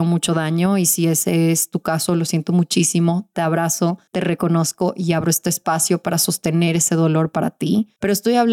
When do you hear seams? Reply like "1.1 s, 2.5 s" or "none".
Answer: none